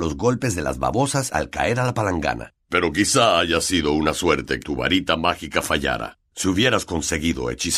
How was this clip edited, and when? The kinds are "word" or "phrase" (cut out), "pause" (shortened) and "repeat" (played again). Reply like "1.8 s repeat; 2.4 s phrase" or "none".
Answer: 4.6 s word